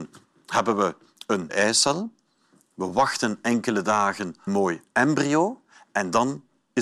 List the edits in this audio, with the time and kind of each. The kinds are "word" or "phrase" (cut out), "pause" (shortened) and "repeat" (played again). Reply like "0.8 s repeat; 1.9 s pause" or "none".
1.5 s word; 4.5 s phrase